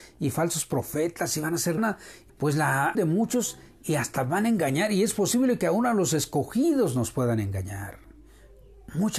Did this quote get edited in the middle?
yes; 3 cuts; at 1.8 s, 2.3 s, 2.9 s

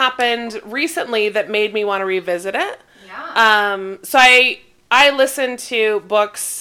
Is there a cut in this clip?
no; 0 cuts

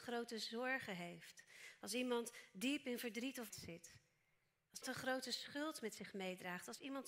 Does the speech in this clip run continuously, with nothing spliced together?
no; 2 cuts; at 3.5 s, 4.8 s

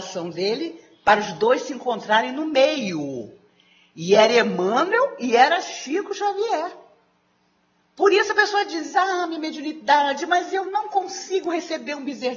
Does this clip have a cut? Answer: no; 0 cuts

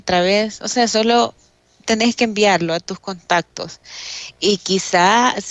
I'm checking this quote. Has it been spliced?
no; 0 cuts

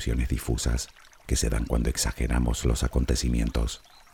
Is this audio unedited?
yes; 0 cuts

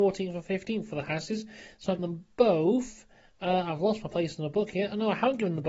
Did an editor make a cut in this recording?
yes; 1 cut; at 2.0 s

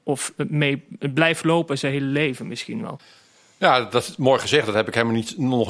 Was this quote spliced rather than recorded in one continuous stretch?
no; 0 cuts

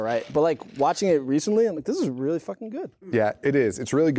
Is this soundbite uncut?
yes; 0 cuts

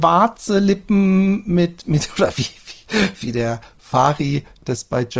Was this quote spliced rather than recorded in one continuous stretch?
no; 0 cuts

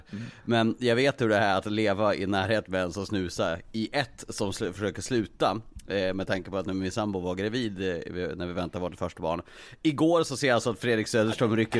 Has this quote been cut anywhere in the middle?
no; 0 cuts

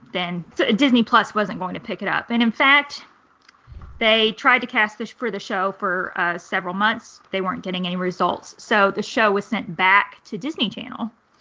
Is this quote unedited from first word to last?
yes; 0 cuts

